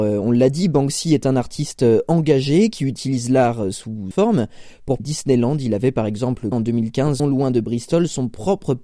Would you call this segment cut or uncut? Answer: cut